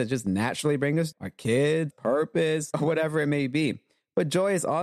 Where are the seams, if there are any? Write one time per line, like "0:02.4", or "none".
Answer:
0:01.1
0:01.9
0:02.7